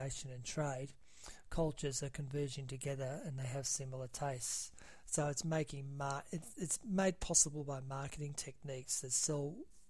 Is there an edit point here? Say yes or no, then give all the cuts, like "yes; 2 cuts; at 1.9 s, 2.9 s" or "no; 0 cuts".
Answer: no; 0 cuts